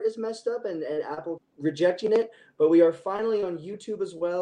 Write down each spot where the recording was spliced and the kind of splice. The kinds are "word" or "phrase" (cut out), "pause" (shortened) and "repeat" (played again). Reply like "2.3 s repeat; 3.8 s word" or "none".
1.4 s word

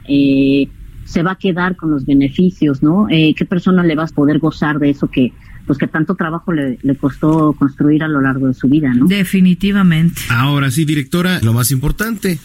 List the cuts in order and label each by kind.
4.1 s phrase; 11.4 s word

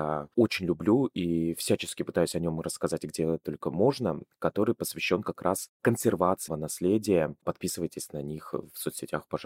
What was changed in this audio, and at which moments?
6.5 s word

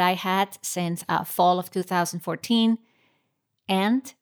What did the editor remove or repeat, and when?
none

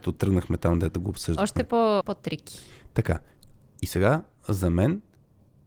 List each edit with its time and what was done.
2.0 s word

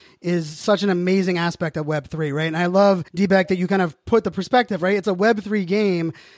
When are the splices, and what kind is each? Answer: 3.1 s pause

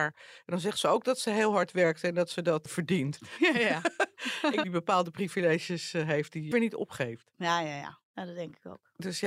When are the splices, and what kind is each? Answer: 2.7 s word; 4.6 s phrase; 6.5 s word

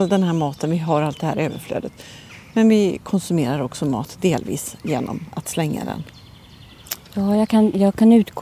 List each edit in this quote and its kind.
7.0 s pause

